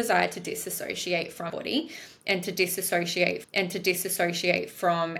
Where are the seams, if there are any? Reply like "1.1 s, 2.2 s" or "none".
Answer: 1.5 s, 3.4 s